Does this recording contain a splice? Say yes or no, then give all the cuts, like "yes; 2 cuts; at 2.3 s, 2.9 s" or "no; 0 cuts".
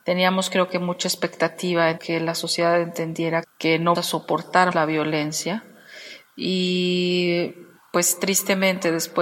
yes; 4 cuts; at 2.0 s, 3.4 s, 3.9 s, 4.7 s